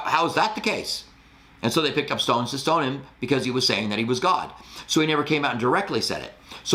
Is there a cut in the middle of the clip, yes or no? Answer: no